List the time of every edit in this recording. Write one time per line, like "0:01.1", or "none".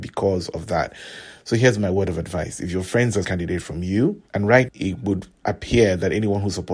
0:03.2
0:04.3
0:04.7